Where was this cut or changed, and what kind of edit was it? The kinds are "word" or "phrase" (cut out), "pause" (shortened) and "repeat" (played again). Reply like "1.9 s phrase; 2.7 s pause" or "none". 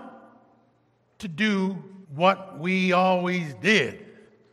2.0 s pause